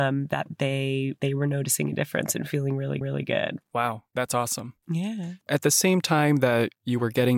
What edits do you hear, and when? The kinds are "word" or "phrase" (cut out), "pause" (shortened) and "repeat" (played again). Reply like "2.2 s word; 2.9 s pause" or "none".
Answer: 1.2 s word; 3.0 s repeat; 4.1 s pause; 5.5 s word